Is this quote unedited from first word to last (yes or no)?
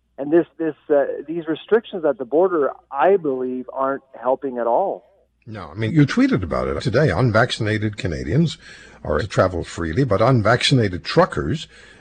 no